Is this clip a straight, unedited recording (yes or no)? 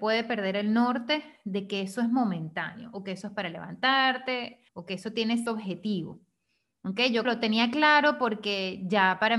no